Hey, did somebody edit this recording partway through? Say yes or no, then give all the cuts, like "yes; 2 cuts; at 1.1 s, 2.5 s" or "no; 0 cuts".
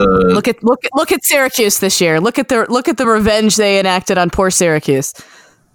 no; 0 cuts